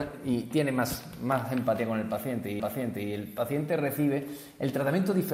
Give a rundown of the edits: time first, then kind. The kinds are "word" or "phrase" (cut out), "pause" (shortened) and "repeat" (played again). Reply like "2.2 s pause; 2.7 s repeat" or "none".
2.6 s repeat